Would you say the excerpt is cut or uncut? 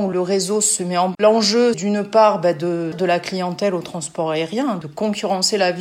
cut